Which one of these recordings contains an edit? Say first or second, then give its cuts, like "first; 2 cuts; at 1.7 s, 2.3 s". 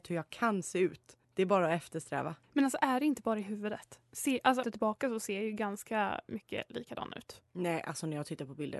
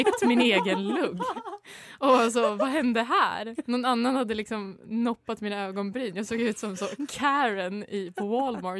first; 3 cuts; at 1.2 s, 2.4 s, 4.6 s